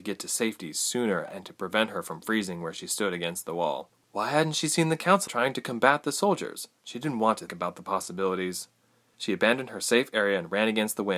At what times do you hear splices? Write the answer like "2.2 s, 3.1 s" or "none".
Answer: 5.3 s, 7.5 s